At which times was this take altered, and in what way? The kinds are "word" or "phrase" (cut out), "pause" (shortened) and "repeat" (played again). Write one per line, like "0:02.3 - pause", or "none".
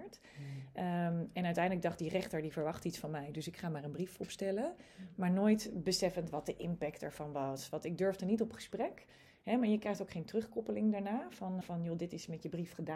0:11.6 - word